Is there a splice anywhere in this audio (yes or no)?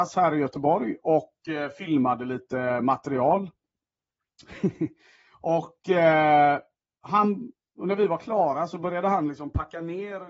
no